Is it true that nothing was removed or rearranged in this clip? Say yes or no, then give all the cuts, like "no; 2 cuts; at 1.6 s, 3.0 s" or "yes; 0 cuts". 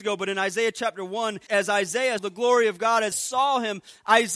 no; 3 cuts; at 1.5 s, 2.2 s, 3.1 s